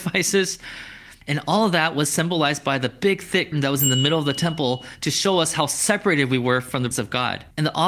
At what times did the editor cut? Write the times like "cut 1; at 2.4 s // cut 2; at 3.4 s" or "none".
cut 1; at 3.5 s // cut 2; at 6.9 s